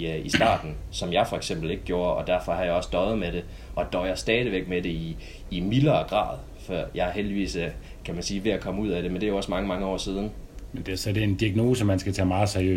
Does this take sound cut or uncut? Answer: uncut